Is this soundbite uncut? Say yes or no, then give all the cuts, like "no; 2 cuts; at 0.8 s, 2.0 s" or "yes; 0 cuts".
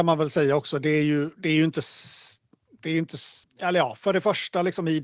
yes; 0 cuts